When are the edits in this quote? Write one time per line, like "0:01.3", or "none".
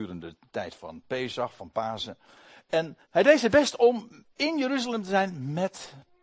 0:03.0
0:04.3